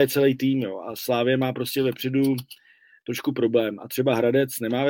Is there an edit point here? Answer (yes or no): no